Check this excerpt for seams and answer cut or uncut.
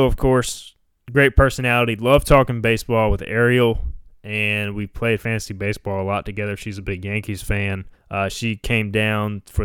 cut